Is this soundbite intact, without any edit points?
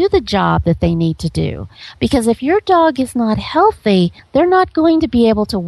yes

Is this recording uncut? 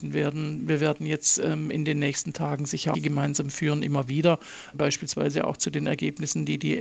no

